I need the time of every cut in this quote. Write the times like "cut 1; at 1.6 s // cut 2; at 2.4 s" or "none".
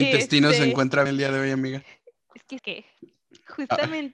cut 1; at 1.1 s // cut 2; at 2.6 s